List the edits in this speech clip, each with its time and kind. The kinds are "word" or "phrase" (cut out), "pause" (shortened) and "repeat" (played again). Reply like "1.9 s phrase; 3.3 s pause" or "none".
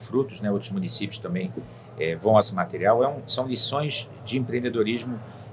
2.4 s word

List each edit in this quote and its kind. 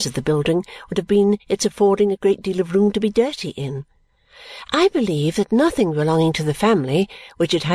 none

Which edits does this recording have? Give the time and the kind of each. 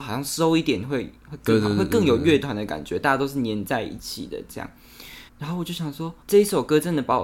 5.3 s pause; 6.2 s pause

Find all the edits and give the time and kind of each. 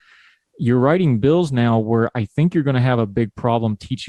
none

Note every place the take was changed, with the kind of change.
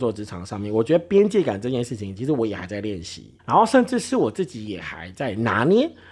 3.4 s pause

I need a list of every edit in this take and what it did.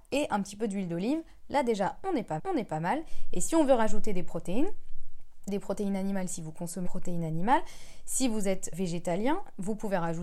2.4 s repeat; 5.5 s phrase; 6.9 s word; 8.7 s word

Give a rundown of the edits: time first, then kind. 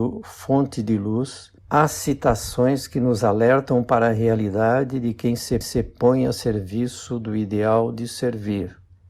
1.6 s pause; 5.6 s repeat

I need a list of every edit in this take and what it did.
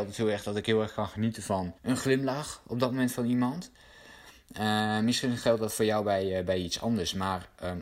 1.8 s pause

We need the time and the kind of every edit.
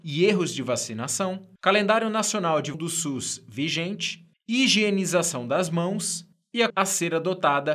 1.6 s pause; 2.7 s word; 4.3 s pause; 6.3 s pause; 6.7 s word

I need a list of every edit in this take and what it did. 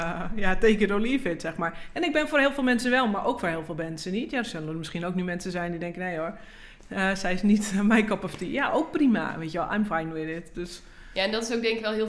none

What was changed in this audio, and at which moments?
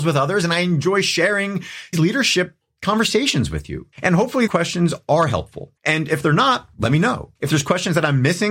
1.9 s word; 3.9 s pause; 4.5 s word; 5.8 s pause; 7.4 s pause

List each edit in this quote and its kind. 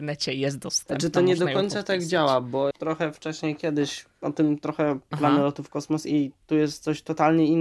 2.7 s word; 5.1 s phrase

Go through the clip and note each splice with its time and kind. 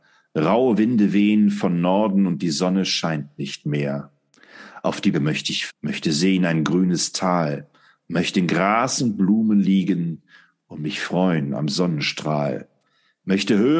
5.1 s word; 5.7 s word

